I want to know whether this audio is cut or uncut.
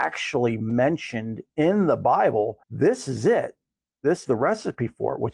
cut